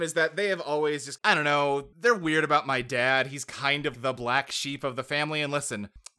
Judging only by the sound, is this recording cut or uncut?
cut